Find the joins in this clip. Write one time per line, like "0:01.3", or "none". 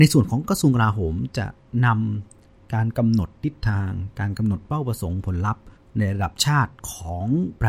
0:05.8
0:06.8